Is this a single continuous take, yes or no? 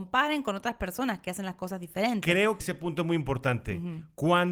no